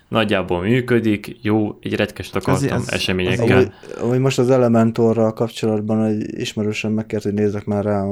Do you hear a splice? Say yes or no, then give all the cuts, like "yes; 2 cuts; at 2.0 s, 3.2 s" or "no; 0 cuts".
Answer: yes; 1 cut; at 2.3 s